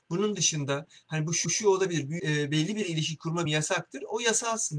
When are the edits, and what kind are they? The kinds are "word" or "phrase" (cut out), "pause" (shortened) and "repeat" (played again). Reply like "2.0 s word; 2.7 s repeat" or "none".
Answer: 1.5 s repeat; 2.2 s word; 3.5 s word